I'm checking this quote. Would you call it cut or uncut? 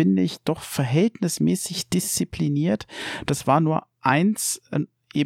uncut